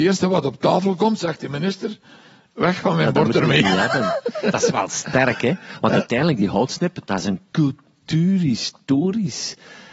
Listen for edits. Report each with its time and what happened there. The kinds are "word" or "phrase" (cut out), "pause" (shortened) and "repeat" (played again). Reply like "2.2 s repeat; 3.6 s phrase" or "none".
none